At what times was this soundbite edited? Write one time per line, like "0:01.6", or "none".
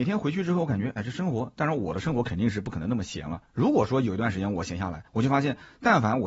0:05.1